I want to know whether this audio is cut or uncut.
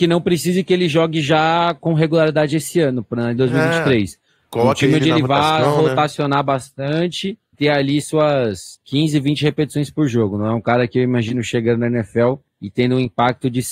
cut